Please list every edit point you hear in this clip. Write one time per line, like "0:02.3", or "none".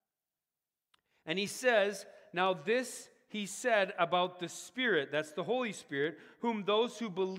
none